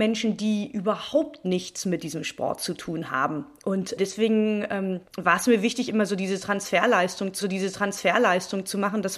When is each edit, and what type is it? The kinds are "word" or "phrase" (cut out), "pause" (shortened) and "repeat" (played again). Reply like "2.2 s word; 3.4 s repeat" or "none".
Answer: 4.0 s word; 5.1 s pause; 7.4 s repeat